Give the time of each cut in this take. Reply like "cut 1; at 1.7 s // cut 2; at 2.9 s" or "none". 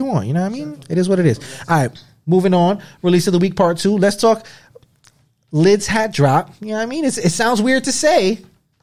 none